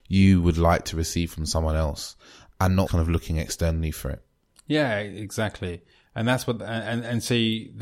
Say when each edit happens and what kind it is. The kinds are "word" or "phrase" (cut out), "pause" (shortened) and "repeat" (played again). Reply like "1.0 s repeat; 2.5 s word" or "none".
2.9 s word